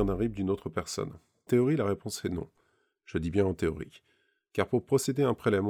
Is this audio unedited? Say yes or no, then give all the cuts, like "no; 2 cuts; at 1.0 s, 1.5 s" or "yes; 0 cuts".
no; 1 cut; at 1.5 s